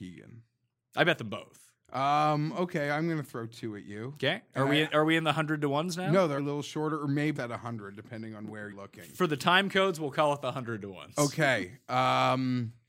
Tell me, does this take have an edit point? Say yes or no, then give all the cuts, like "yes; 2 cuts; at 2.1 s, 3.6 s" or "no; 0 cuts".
yes; 3 cuts; at 6.4 s, 7.4 s, 8.7 s